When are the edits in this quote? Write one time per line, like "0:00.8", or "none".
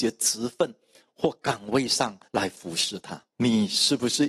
0:02.3
0:03.3